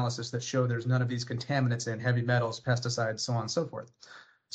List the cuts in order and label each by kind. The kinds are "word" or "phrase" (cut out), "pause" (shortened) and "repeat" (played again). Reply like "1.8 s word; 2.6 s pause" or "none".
none